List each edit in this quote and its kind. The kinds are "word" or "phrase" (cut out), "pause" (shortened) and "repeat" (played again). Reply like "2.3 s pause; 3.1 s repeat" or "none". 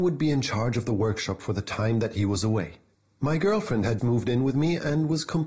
2.9 s pause; 4.0 s word